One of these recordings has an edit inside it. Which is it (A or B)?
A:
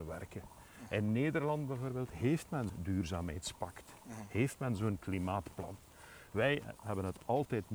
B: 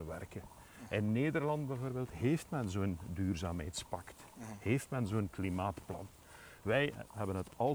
A